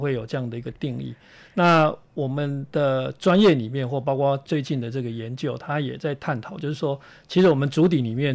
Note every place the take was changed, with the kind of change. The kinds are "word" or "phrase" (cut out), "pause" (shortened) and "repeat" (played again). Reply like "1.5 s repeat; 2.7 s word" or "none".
none